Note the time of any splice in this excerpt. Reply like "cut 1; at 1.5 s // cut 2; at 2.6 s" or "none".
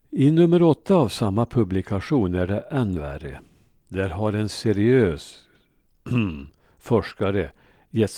none